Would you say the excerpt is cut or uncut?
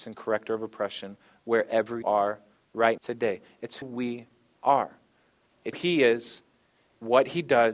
cut